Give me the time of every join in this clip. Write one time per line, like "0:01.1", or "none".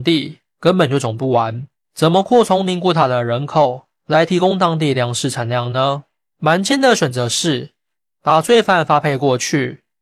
none